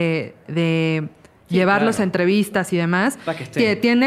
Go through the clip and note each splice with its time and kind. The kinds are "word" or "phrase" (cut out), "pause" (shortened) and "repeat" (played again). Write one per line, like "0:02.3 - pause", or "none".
none